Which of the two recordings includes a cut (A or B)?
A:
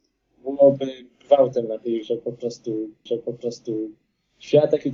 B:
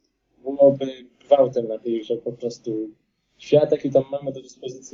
A